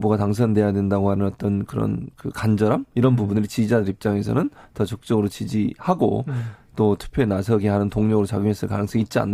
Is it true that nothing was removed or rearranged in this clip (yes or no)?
yes